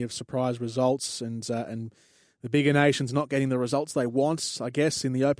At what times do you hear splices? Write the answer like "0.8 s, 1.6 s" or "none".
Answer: none